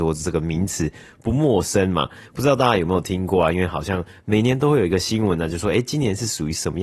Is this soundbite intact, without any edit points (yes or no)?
yes